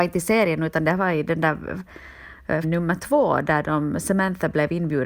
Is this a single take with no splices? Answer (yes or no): no